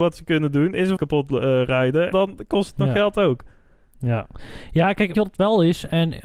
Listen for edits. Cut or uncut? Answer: cut